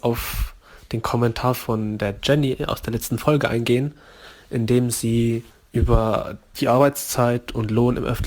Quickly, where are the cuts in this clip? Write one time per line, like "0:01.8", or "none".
0:05.5